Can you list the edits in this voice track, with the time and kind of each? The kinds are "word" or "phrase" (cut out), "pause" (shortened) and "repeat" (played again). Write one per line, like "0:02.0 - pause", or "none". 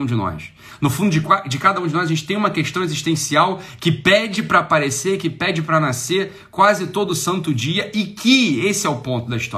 none